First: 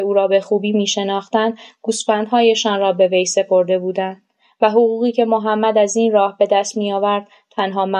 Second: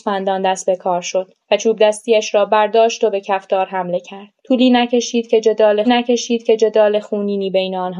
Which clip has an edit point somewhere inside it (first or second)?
second